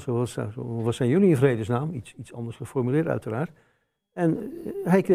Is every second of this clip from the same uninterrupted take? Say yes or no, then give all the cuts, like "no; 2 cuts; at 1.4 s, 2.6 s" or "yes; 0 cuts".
yes; 0 cuts